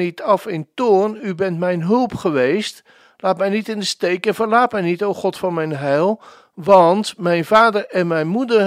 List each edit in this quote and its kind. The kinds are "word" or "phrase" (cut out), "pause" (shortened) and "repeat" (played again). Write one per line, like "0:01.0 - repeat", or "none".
none